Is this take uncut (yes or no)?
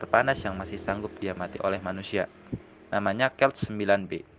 yes